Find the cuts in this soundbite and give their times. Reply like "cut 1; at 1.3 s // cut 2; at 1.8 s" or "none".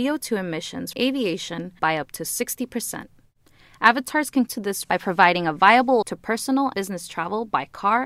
cut 1; at 0.9 s // cut 2; at 1.8 s // cut 3; at 4.5 s // cut 4; at 4.8 s // cut 5; at 6.0 s // cut 6; at 6.7 s